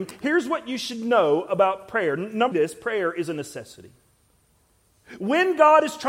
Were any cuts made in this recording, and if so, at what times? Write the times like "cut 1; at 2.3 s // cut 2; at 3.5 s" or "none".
cut 1; at 2.5 s